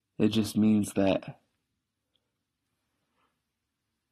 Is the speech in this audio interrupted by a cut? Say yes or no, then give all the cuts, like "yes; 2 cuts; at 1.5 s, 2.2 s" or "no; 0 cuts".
no; 0 cuts